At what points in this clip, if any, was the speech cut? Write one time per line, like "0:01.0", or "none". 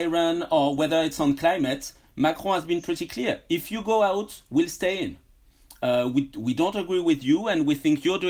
none